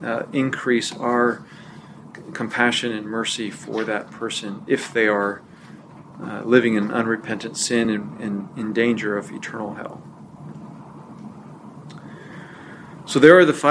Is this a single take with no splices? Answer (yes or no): yes